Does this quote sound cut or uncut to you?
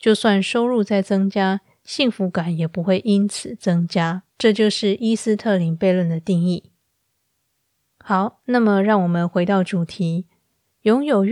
cut